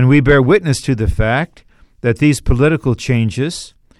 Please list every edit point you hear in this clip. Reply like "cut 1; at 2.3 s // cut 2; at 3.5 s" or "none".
none